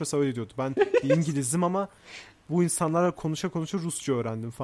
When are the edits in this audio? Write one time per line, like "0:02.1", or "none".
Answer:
none